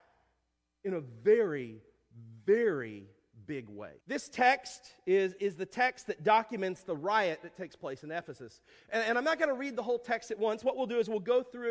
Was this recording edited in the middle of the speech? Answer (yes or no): yes